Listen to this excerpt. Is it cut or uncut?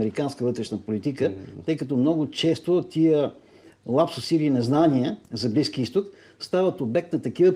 cut